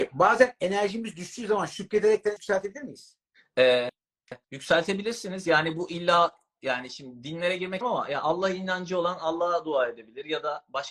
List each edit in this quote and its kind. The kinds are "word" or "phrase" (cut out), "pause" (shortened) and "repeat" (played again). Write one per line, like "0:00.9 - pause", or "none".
0:02.4 - word
0:04.4 - pause
0:07.8 - word